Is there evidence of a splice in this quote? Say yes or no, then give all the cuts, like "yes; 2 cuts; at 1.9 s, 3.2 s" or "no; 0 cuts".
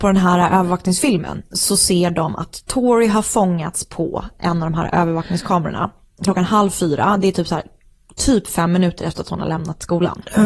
no; 0 cuts